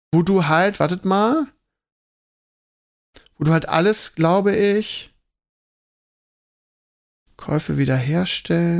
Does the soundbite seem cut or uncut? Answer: uncut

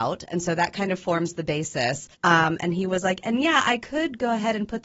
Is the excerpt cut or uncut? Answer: cut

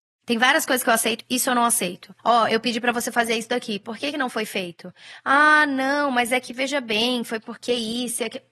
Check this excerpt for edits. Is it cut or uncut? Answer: cut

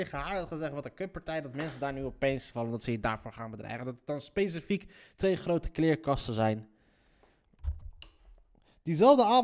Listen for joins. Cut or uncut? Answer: cut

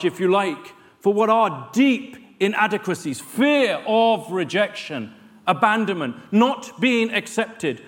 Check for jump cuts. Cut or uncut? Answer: uncut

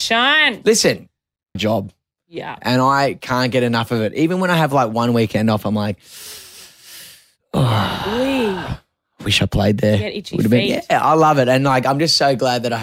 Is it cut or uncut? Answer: cut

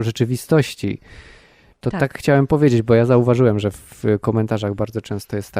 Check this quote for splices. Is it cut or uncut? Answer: uncut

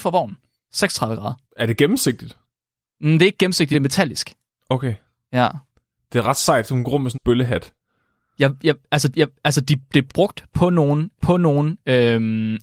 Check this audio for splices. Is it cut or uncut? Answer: cut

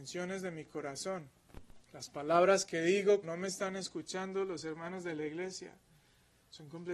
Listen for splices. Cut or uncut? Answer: cut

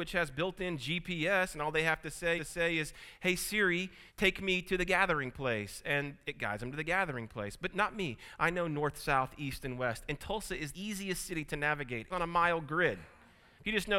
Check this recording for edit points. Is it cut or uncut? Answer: cut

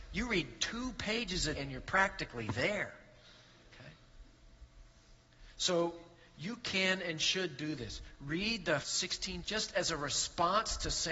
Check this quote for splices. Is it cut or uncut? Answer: cut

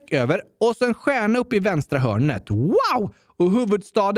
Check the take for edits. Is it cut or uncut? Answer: uncut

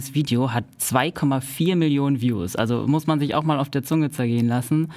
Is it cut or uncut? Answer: uncut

